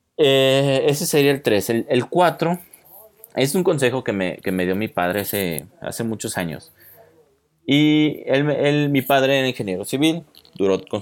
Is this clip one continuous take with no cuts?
yes; 0 cuts

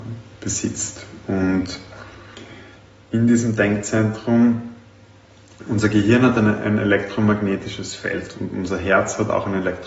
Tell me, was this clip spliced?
no; 0 cuts

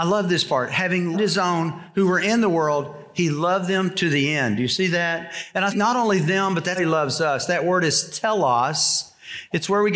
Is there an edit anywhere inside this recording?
yes; 3 cuts; at 1.1 s, 5.7 s, 6.8 s

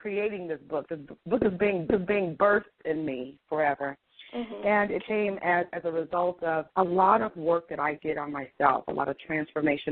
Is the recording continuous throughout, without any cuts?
no; 4 cuts; at 1.9 s, 5.0 s, 5.7 s, 6.7 s

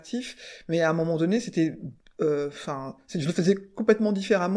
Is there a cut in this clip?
yes; 1 cut; at 2.0 s

